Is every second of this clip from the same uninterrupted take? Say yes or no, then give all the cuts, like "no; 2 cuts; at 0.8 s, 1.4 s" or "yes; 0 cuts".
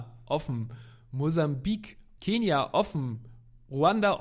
no; 1 cut; at 2.2 s